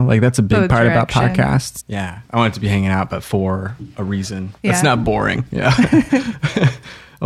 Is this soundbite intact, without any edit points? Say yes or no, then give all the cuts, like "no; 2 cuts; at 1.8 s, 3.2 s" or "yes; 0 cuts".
no; 3 cuts; at 1.8 s, 2.2 s, 4.6 s